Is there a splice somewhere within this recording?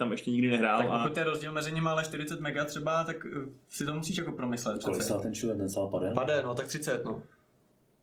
no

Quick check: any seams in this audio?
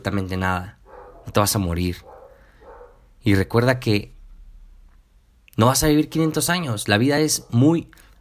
no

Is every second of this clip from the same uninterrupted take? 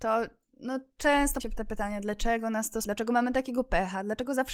no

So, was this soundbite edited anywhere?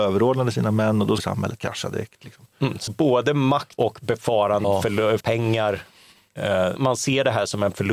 yes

